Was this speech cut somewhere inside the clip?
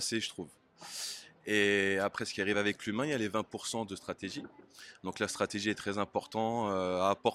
no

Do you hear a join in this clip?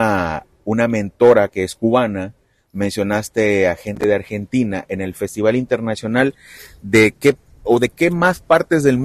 no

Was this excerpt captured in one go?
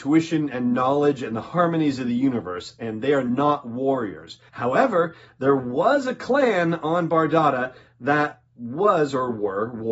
no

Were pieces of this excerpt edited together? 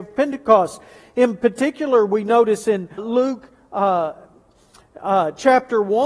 yes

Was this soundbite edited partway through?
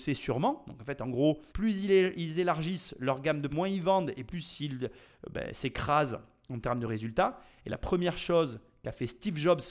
yes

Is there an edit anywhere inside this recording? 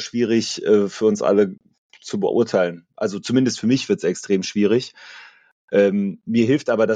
no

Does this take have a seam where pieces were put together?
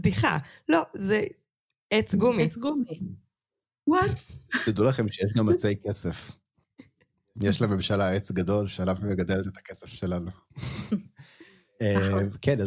no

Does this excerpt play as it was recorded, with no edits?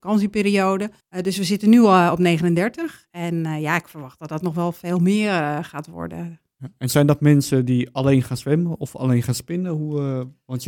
no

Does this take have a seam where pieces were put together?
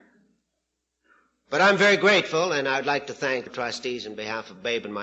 yes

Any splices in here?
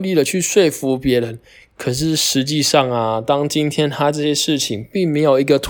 no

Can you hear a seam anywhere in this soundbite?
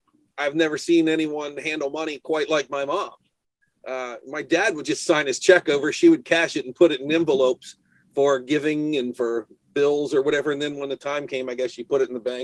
no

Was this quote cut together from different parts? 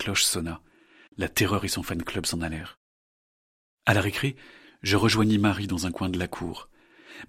no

